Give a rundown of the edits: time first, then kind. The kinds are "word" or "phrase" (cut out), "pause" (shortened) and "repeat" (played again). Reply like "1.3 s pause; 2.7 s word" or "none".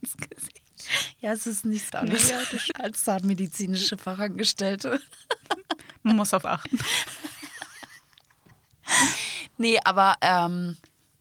1.9 s word; 2.7 s word; 6.4 s word

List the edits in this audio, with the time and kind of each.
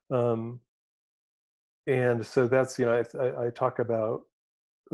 none

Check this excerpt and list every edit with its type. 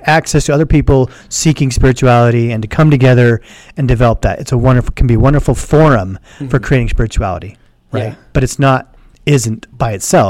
none

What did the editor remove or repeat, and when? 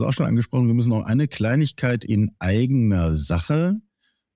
none

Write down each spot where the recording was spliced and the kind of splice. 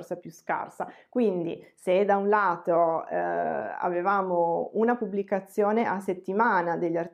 none

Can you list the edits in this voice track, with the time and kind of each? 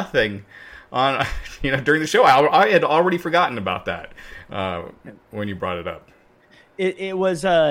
none

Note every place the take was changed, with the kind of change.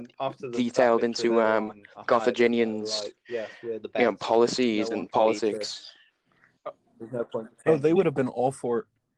none

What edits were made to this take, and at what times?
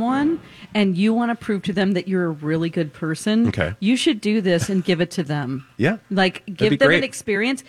6.0 s pause

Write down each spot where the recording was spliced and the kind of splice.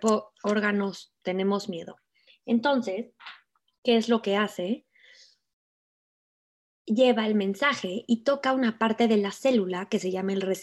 none

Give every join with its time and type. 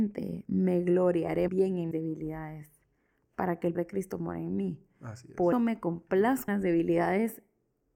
1.5 s word; 1.9 s word; 3.7 s word; 5.5 s word; 6.5 s word

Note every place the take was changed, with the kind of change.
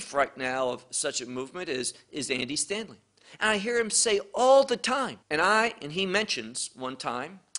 5.2 s pause

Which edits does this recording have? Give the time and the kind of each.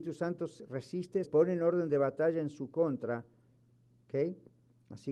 1.2 s word

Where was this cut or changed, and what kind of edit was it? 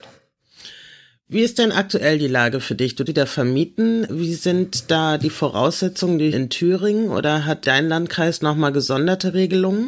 3.1 s word; 6.3 s word; 7.6 s word

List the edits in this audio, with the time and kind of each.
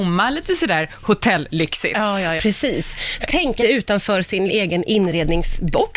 2.4 s word; 3.3 s word; 3.6 s word; 4.5 s word

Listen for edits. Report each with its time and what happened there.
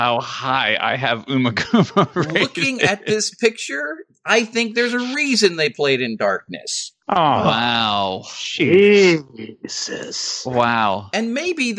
7.0 s pause

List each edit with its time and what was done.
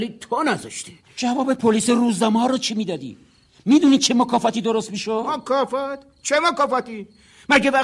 none

